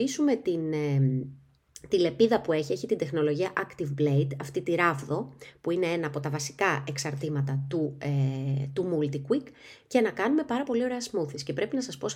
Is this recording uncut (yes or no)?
yes